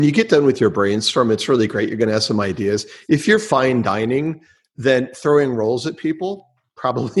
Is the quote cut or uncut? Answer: uncut